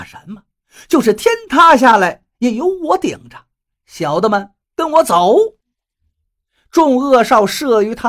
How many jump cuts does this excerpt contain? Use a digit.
0